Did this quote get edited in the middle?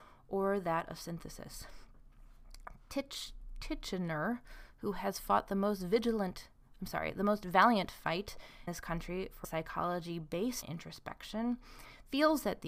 yes; 3 cuts; at 8.7 s, 9.4 s, 10.6 s

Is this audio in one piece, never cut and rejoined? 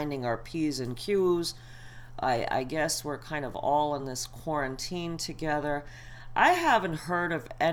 yes; 0 cuts

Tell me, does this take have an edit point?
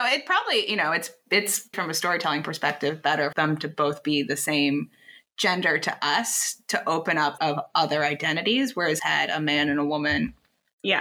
yes; 4 cuts; at 1.7 s, 3.3 s, 7.4 s, 9.0 s

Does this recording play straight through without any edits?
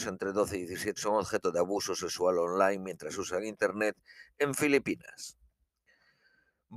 no; 1 cut; at 1.0 s

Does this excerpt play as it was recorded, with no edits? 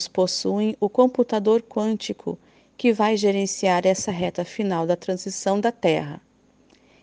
yes; 0 cuts

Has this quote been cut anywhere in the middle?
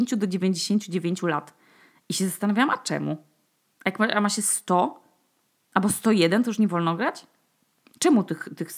no; 0 cuts

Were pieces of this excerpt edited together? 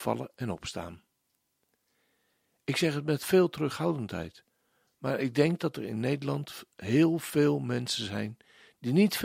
no; 0 cuts

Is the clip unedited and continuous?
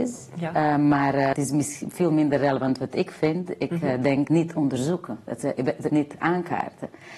no; 3 cuts; at 1.3 s, 4.3 s, 5.9 s

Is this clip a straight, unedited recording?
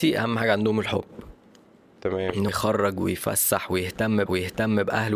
no; 2 cuts; at 2.5 s, 4.3 s

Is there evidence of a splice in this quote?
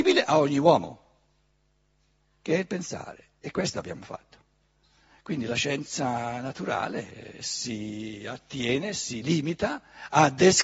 no; 0 cuts

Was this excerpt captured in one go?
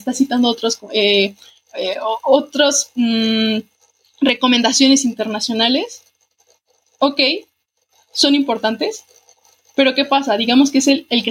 yes; 0 cuts

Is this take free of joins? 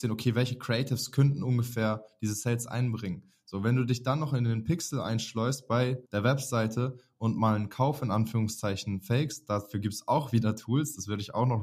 no; 1 cut; at 6.1 s

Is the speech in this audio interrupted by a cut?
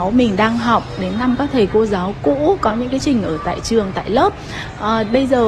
yes; 1 cut; at 3.0 s

